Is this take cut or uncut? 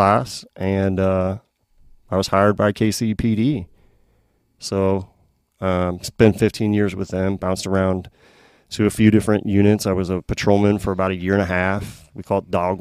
uncut